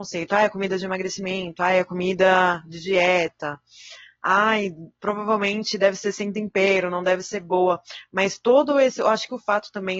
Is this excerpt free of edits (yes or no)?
yes